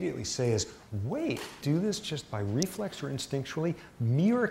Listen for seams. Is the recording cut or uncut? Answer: cut